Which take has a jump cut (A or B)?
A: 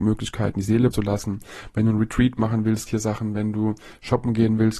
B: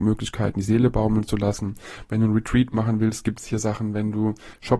A